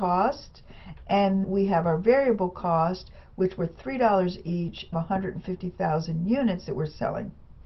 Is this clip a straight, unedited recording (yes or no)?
no